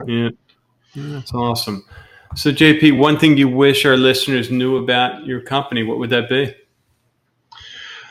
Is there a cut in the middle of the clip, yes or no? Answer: no